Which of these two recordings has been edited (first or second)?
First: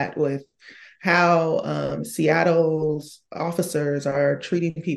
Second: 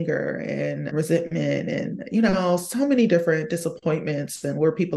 second